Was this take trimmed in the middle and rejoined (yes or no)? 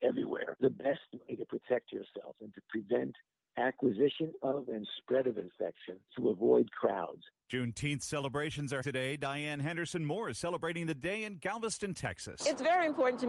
yes